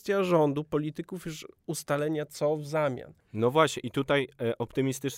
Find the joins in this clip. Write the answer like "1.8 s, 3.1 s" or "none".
none